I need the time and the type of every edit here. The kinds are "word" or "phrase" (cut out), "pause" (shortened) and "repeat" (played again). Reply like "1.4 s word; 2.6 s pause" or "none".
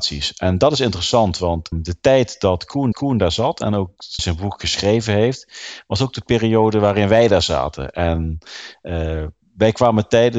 1.7 s word; 2.9 s repeat; 4.2 s phrase